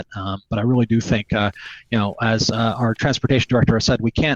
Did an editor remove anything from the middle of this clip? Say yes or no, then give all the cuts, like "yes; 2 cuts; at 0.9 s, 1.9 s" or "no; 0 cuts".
no; 0 cuts